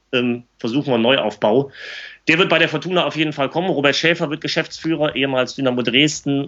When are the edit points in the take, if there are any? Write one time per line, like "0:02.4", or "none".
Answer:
none

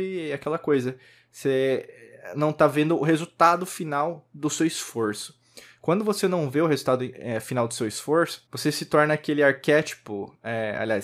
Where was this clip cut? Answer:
0:08.5

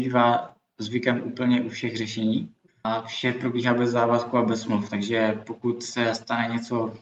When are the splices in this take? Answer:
0:02.7

